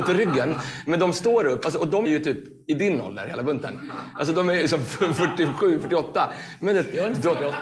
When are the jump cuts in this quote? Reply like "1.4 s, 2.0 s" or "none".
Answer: 2.0 s